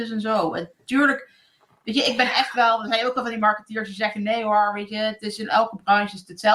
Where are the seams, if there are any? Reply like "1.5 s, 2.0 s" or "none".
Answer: none